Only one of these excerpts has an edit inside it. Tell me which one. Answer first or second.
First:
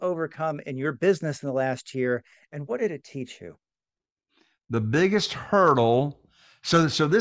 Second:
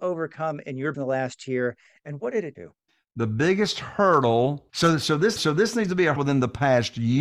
second